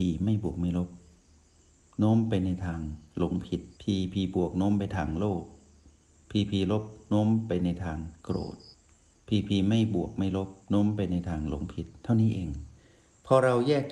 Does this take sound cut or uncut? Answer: cut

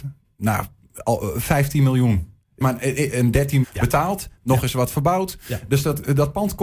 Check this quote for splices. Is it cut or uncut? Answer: cut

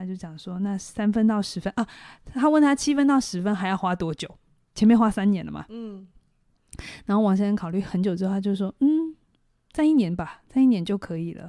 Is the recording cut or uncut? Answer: uncut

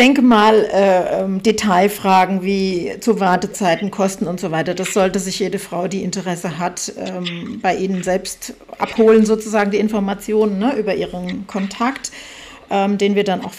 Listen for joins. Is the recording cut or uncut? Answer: uncut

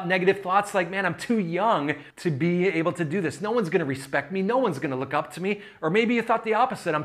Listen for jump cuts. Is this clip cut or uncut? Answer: cut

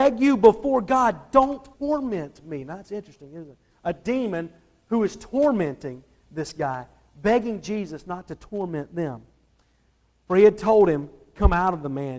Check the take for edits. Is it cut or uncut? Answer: cut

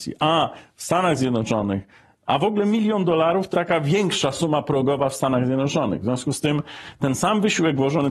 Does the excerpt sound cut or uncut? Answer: cut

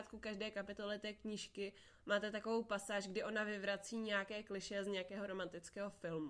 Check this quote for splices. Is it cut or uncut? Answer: uncut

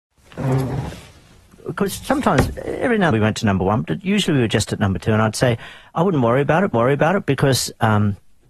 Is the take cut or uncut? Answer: cut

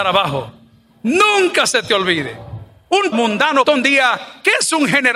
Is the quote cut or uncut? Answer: cut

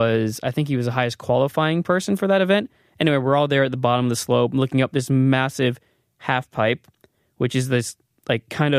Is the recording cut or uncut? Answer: uncut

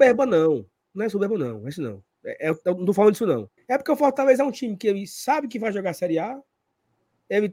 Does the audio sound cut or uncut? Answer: cut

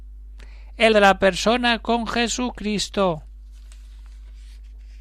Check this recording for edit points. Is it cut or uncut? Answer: cut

